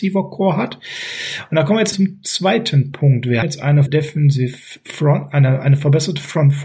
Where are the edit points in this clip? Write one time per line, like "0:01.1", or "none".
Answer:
0:01.9
0:03.4
0:03.9